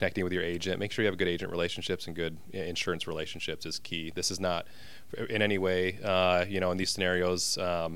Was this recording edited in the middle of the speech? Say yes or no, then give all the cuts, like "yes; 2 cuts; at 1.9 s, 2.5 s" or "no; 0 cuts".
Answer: no; 0 cuts